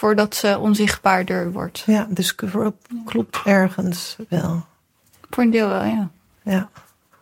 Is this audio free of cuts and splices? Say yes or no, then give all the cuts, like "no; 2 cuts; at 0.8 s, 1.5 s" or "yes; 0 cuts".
yes; 0 cuts